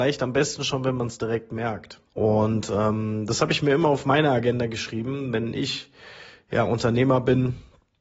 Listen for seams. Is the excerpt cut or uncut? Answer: cut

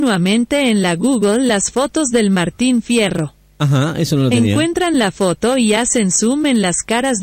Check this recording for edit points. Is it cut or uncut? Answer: uncut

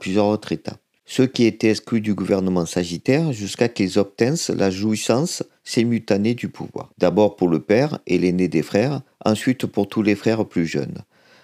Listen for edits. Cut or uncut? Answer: cut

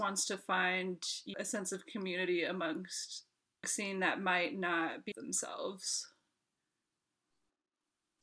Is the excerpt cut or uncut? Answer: cut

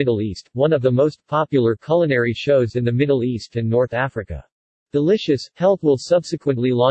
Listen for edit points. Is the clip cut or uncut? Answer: cut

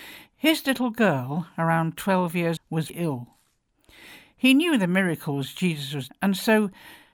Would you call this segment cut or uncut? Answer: cut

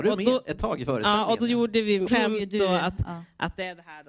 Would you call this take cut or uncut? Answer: cut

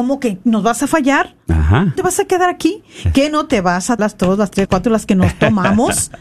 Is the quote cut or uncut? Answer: cut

